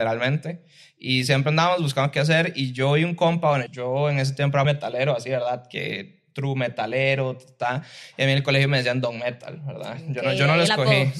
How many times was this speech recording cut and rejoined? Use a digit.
2